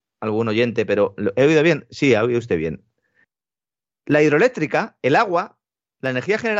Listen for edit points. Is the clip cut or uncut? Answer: uncut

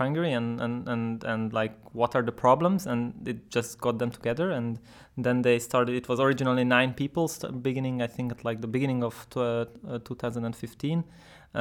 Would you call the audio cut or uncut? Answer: uncut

